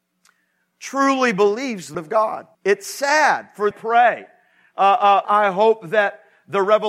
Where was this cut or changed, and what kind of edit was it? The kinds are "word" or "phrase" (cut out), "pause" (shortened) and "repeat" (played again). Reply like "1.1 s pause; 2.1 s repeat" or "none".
1.9 s word; 2.5 s pause; 3.7 s phrase; 5.2 s phrase